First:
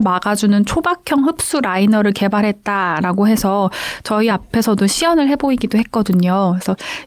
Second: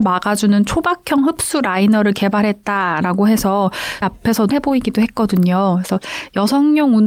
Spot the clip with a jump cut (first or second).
second